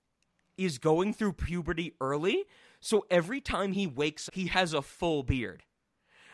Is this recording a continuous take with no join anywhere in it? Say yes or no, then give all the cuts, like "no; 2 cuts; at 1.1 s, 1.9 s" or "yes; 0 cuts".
no; 1 cut; at 4.3 s